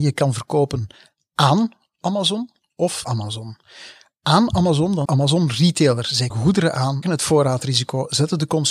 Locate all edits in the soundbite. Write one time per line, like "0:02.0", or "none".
0:03.0
0:05.0
0:06.3
0:07.0